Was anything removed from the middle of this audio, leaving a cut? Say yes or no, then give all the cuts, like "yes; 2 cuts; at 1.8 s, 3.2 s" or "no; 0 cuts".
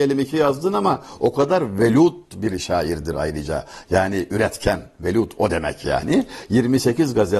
no; 0 cuts